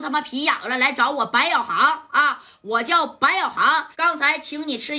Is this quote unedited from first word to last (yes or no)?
no